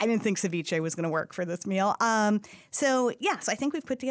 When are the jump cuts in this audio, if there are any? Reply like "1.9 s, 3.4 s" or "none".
none